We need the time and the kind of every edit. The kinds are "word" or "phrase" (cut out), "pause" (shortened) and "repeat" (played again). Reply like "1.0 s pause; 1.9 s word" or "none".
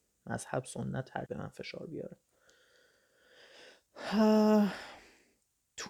1.3 s word